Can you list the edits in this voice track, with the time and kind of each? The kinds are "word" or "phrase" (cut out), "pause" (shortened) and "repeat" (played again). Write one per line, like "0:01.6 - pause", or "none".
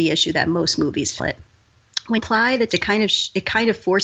0:01.2 - word
0:02.2 - word
0:02.7 - word